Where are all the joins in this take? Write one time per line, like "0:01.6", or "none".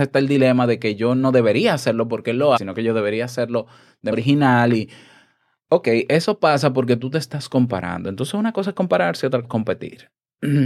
0:02.6
0:04.1
0:09.4